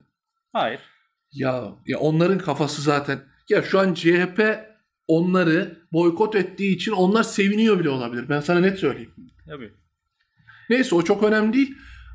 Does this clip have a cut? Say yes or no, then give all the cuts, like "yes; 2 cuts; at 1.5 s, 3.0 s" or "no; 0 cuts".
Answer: no; 0 cuts